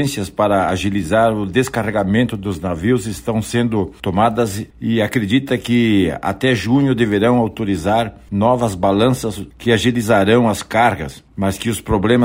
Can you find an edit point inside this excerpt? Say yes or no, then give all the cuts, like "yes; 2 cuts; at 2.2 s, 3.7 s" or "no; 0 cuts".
no; 0 cuts